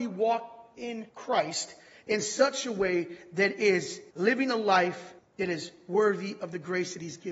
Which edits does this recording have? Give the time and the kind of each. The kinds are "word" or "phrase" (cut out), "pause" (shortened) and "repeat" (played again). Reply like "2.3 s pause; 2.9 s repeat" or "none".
1.1 s pause; 4.1 s pause; 5.2 s pause